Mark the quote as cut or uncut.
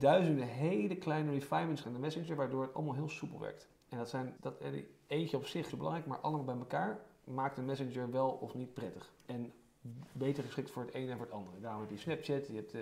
cut